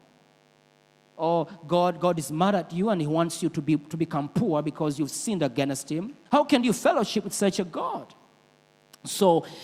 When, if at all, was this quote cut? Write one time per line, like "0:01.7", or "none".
0:06.3